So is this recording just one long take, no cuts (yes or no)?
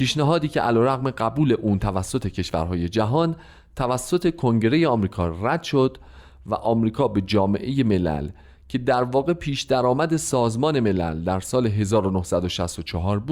yes